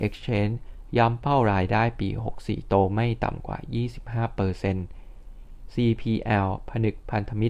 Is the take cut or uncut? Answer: uncut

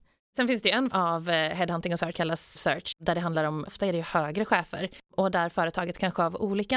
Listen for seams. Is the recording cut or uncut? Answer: cut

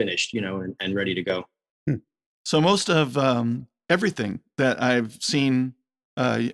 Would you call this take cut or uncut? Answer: uncut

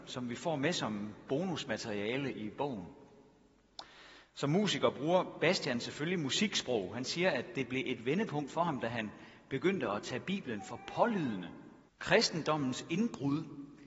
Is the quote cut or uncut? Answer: cut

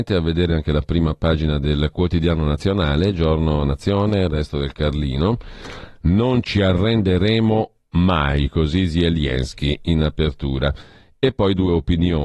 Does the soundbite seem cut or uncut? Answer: uncut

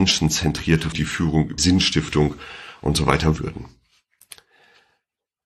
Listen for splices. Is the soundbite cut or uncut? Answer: cut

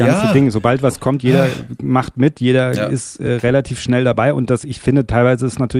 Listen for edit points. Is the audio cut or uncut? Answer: uncut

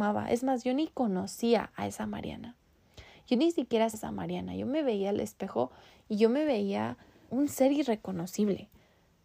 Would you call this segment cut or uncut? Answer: cut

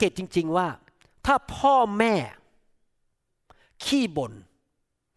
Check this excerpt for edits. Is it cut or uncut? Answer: uncut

